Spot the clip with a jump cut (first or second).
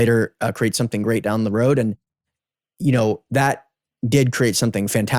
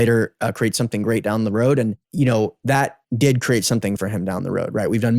second